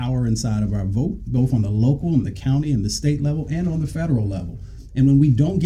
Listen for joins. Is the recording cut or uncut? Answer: uncut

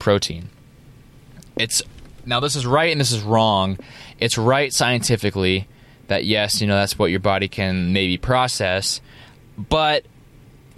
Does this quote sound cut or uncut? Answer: uncut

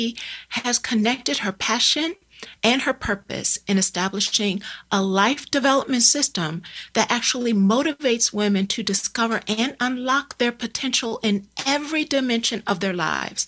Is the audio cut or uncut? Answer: uncut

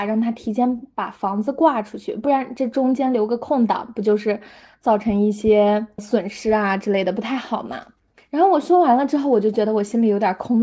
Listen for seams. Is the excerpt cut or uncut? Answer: uncut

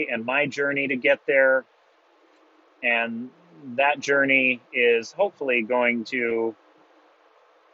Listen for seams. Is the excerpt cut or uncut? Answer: uncut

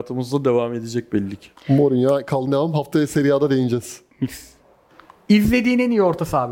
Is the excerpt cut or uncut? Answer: cut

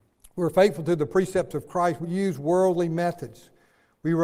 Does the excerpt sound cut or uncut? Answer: cut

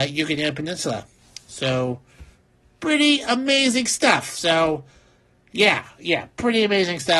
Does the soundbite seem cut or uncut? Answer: uncut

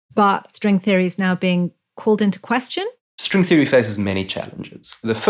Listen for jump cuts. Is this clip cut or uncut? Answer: uncut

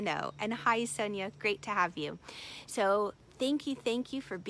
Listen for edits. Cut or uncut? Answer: uncut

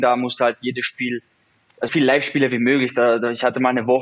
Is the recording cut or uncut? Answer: cut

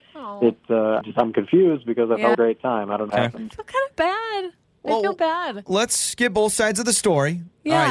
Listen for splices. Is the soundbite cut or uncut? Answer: cut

